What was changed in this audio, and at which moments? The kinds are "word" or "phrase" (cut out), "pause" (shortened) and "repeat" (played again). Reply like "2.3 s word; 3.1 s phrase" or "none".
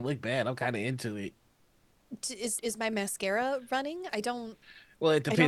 2.6 s word; 4.1 s word